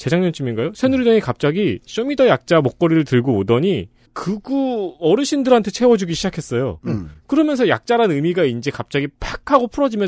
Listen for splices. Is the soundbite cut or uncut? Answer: uncut